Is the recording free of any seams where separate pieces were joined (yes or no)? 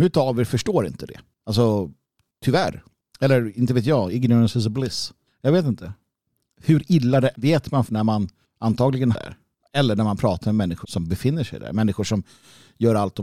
no